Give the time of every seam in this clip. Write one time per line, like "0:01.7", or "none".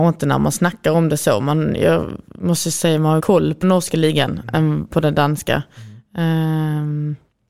0:03.2
0:03.6
0:04.9